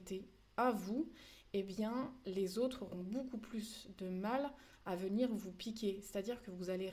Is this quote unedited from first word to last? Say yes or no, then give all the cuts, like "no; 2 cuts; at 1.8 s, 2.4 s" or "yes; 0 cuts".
yes; 0 cuts